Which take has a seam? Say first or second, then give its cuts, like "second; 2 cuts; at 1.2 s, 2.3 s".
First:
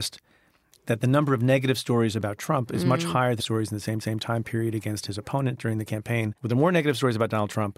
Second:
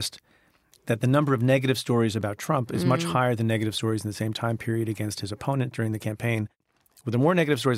first; 3 cuts; at 3.4 s, 4.0 s, 6.4 s